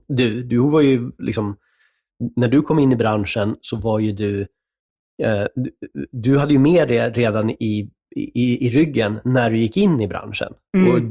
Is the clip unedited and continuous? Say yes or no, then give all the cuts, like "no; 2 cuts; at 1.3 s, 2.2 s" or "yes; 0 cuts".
yes; 0 cuts